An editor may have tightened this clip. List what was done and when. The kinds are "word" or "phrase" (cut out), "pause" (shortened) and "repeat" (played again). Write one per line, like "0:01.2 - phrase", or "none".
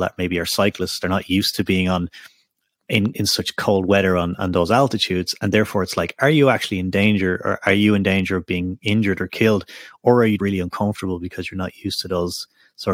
0:10.4 - word